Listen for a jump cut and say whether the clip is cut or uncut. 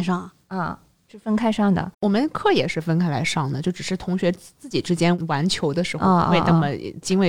cut